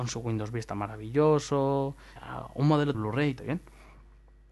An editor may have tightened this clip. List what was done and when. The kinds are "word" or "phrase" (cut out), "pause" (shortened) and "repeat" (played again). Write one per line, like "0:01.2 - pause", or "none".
0:02.2 - word
0:02.9 - word
0:03.4 - phrase